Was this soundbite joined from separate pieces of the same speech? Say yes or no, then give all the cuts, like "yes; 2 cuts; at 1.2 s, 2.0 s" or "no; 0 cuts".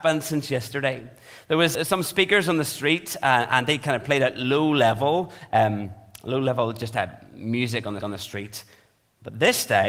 yes; 2 cuts; at 1.7 s, 8.0 s